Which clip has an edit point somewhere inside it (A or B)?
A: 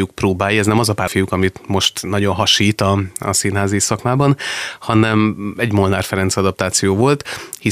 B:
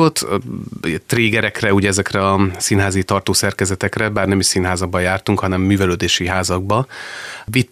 A